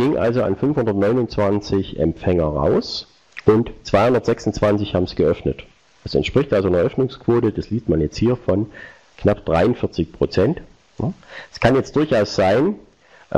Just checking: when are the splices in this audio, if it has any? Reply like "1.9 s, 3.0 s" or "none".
none